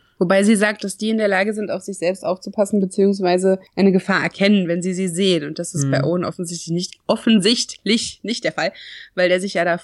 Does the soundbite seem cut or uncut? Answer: cut